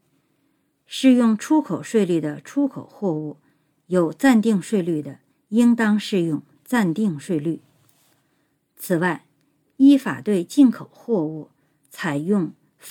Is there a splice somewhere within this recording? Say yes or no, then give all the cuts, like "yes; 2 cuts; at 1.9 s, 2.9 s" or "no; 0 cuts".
yes; 1 cut; at 5.3 s